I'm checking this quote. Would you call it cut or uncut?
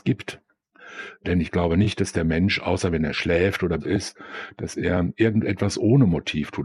cut